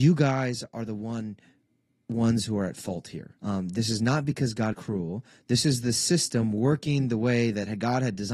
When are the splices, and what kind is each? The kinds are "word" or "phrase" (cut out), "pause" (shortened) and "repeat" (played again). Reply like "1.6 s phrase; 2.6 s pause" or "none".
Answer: 3.4 s pause; 4.7 s word